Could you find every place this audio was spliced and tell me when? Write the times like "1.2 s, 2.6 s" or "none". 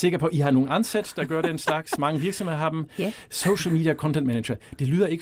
none